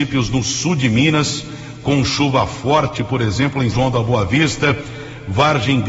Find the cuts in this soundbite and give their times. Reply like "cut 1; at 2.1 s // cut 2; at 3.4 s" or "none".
cut 1; at 3.7 s

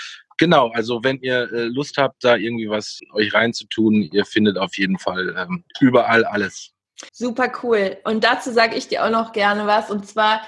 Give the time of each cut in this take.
cut 1; at 3.0 s // cut 2; at 5.7 s // cut 3; at 7.1 s

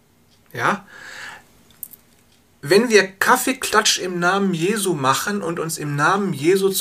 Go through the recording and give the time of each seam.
none

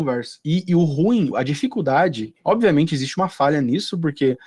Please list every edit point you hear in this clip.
cut 1; at 1.3 s

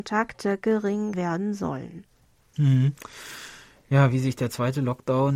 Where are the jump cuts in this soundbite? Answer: cut 1; at 1.1 s

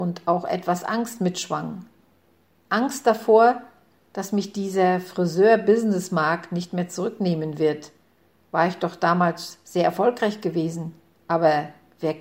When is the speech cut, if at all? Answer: none

